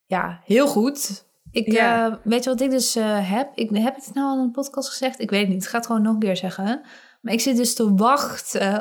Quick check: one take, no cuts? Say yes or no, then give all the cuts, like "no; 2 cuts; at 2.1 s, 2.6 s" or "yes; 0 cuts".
yes; 0 cuts